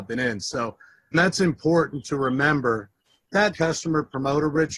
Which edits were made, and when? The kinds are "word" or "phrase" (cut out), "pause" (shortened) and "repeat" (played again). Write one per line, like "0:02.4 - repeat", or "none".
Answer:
0:01.1 - word
0:03.5 - word